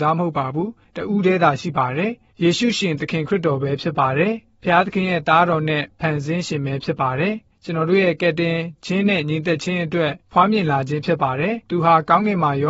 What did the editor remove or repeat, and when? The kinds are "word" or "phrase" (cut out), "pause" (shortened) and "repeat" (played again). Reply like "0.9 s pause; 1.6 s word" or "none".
10.2 s pause; 11.6 s pause

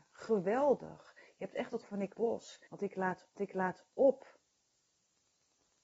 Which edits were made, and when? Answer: 1.8 s word; 2.1 s phrase; 2.7 s pause; 3.4 s repeat

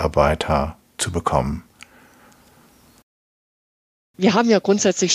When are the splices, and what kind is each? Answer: none

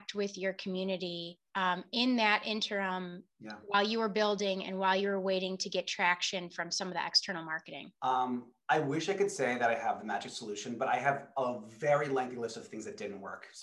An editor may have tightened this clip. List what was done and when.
1.5 s pause; 3.3 s pause; 7.9 s pause

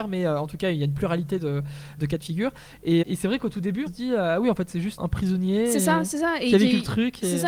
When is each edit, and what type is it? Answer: 2.0 s word; 3.0 s word; 3.9 s word; 5.0 s word

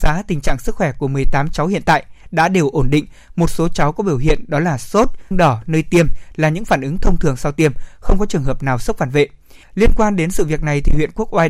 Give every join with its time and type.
5.3 s word; 9.6 s pause

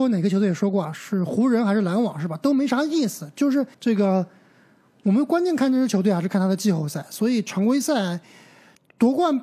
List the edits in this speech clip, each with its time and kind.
3.7 s pause

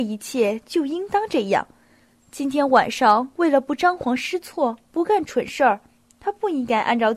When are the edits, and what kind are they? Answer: none

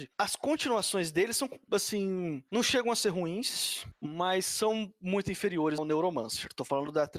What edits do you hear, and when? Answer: 5.8 s phrase

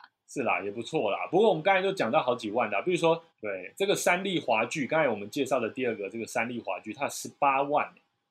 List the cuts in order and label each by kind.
3.3 s pause

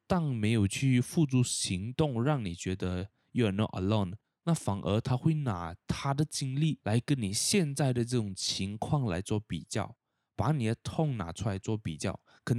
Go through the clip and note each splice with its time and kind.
4.2 s pause

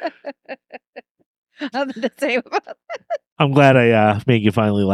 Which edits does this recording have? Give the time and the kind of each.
1.7 s word; 3.3 s pause

